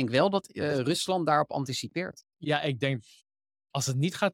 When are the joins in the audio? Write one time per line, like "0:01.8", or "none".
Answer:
none